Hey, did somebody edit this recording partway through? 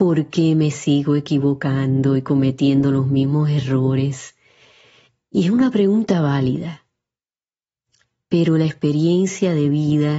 no; 0 cuts

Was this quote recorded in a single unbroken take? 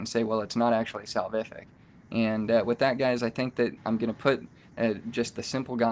no; 1 cut; at 3.8 s

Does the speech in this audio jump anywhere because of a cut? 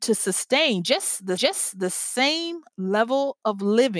yes; 1 cut; at 1.4 s

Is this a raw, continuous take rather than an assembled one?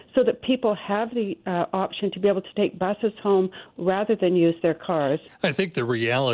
no; 1 cut; at 5.3 s

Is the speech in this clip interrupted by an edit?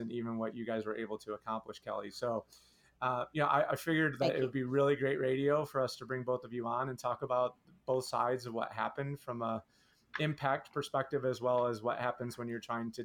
no; 0 cuts

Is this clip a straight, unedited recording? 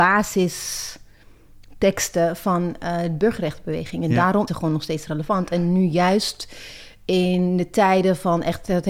no; 1 cut; at 4.5 s

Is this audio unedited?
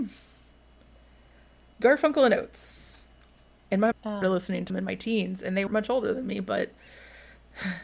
no; 4 cuts; at 3.9 s, 4.2 s, 4.7 s, 5.7 s

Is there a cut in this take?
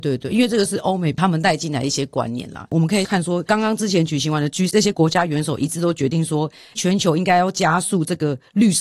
yes; 2 cuts; at 4.7 s, 6.7 s

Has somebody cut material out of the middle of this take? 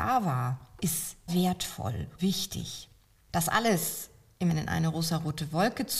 yes; 3 cuts; at 1.3 s, 2.2 s, 4.5 s

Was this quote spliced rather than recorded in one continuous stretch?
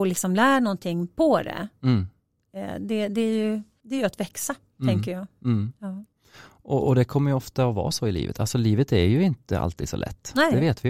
no; 0 cuts

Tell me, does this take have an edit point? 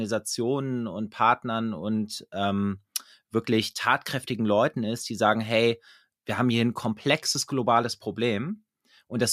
no; 0 cuts

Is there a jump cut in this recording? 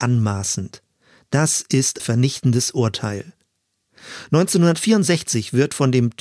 yes; 1 cut; at 2.0 s

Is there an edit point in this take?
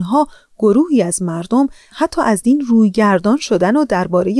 no; 0 cuts

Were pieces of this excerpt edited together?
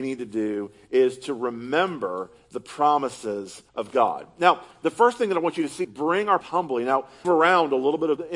yes; 4 cuts; at 3.7 s, 5.8 s, 6.4 s, 7.2 s

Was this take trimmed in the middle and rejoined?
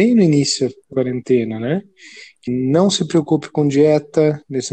yes; 2 cuts; at 0.9 s, 2.5 s

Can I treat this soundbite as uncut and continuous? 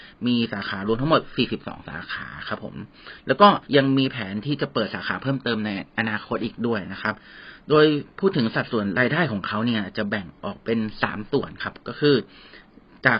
no; 1 cut; at 3.6 s

